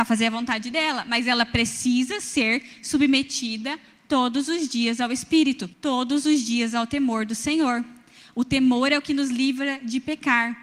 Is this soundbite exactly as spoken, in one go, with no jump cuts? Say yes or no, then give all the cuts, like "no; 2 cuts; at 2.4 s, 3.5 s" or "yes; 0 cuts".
no; 1 cut; at 5.7 s